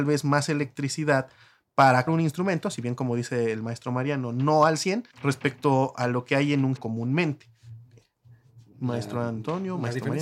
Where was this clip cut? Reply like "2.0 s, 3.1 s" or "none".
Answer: 2.1 s, 5.1 s, 6.8 s